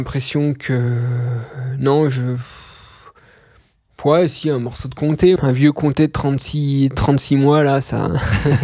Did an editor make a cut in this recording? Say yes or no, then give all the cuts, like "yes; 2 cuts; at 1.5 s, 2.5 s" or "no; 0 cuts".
yes; 1 cut; at 5.4 s